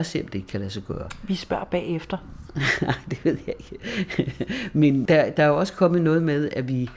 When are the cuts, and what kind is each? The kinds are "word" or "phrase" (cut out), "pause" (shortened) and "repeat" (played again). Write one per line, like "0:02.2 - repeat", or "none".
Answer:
0:05.1 - phrase